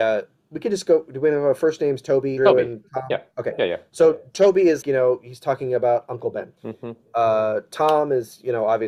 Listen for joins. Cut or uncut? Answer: cut